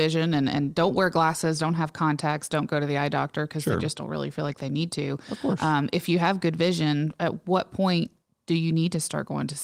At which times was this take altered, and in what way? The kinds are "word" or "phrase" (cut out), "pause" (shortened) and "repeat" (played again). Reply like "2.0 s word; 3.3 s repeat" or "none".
none

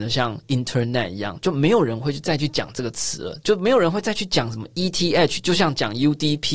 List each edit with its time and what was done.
none

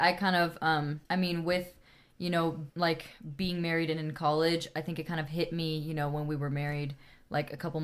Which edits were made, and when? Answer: 1.1 s pause; 2.7 s pause

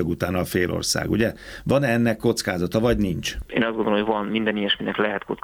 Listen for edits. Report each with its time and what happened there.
none

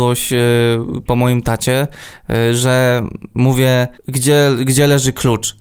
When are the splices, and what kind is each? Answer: 4.0 s pause

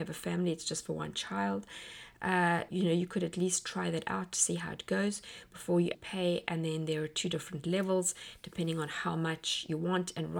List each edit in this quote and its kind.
2.7 s word; 5.9 s word

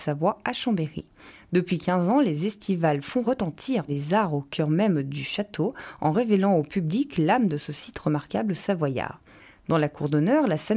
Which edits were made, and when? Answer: none

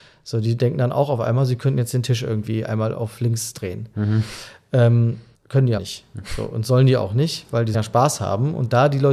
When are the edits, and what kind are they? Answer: 5.3 s pause; 5.8 s word; 7.7 s word

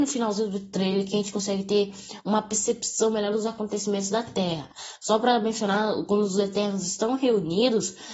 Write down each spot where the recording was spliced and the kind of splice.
none

